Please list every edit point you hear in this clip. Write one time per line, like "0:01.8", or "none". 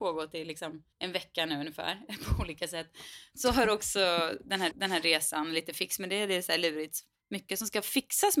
0:00.9
0:04.7